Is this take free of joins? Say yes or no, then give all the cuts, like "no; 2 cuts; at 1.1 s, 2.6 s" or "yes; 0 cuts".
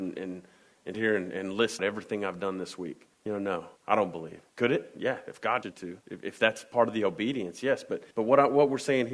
no; 8 cuts; at 0.9 s, 1.8 s, 3.1 s, 3.8 s, 4.5 s, 5.6 s, 6.0 s, 8.1 s